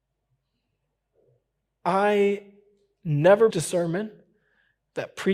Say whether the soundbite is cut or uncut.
cut